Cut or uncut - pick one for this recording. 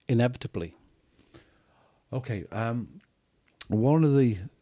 uncut